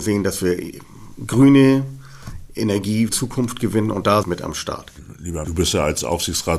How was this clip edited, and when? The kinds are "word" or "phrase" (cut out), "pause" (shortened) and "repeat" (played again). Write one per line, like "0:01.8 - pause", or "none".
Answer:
0:03.1 - phrase
0:04.2 - phrase
0:05.4 - word

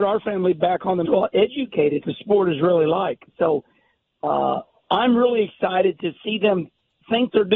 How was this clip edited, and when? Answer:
0:01.1 - phrase
0:02.0 - phrase

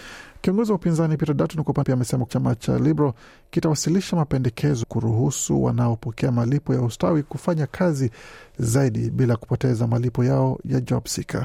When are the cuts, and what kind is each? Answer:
0:01.8 - word
0:02.3 - word
0:04.8 - word

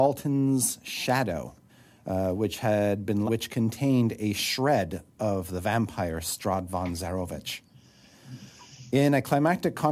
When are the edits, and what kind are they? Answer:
0:01.7 - pause
0:03.3 - phrase

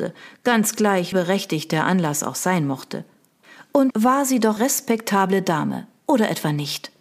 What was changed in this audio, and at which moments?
0:01.1 - word
0:03.9 - word
0:04.6 - word

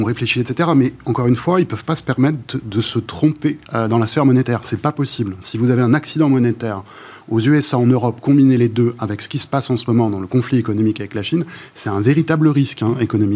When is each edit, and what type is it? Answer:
0:03.6 - pause

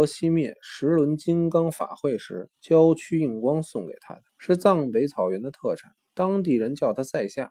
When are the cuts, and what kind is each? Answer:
0:02.5 - pause
0:04.3 - pause
0:06.0 - pause

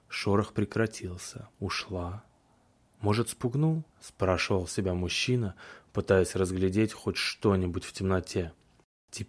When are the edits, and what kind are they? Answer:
0:01.5 - pause
0:03.9 - pause

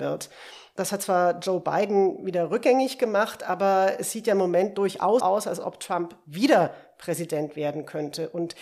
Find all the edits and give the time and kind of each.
0:05.2 - word

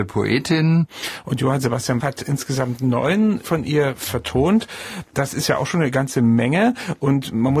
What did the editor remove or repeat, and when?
0:02.0 - word
0:03.4 - word

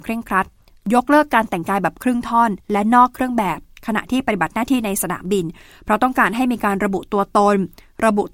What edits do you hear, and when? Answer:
0:02.6 - pause

